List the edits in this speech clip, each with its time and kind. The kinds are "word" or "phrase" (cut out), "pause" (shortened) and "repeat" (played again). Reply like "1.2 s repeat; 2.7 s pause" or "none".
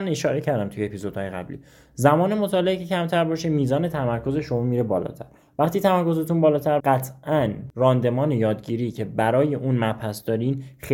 6.8 s word